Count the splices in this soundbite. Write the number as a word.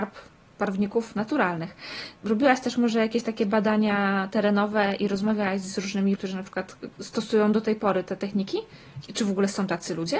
three